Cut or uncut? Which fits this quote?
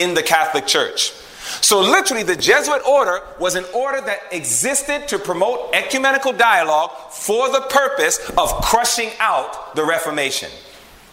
uncut